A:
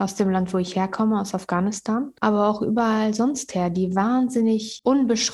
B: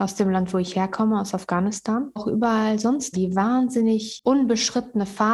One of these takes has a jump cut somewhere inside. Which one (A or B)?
B